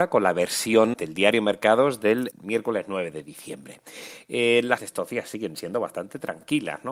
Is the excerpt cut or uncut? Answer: cut